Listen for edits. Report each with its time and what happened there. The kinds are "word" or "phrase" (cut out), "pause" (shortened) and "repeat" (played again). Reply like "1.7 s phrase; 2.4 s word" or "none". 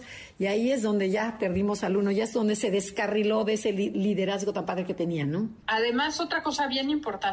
5.6 s pause